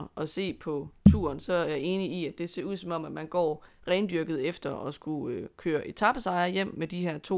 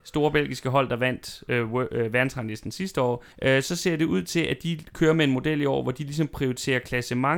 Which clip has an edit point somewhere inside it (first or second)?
second